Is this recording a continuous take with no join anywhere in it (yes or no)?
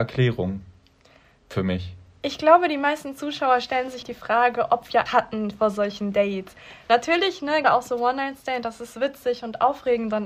no